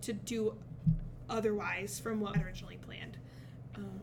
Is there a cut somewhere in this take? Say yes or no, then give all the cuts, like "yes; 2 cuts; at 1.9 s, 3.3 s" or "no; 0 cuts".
yes; 1 cut; at 2.3 s